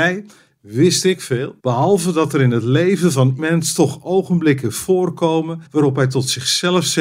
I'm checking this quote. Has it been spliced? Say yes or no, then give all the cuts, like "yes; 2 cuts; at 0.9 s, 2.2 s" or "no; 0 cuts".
yes; 3 cuts; at 1.6 s, 3.4 s, 5.7 s